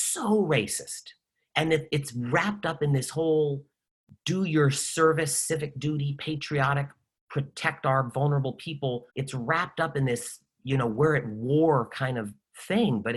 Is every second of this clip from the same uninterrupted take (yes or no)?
no